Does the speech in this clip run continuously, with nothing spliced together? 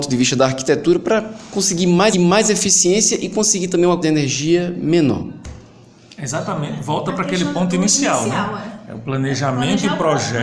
no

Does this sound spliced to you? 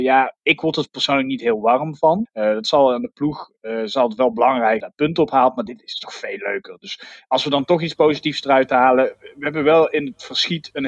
no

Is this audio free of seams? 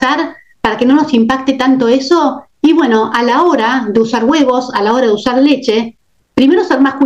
yes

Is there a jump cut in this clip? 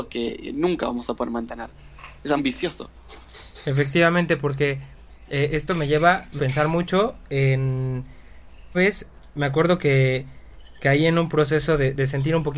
yes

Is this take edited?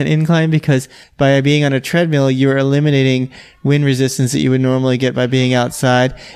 no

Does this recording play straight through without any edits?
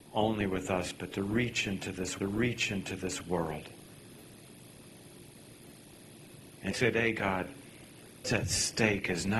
no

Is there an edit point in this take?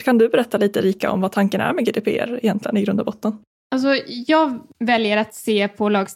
no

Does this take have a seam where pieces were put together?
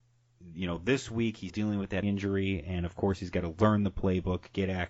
yes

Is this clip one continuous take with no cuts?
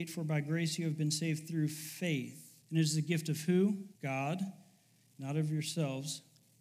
no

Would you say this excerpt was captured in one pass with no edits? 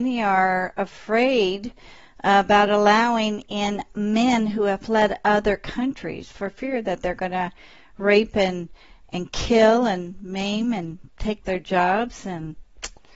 yes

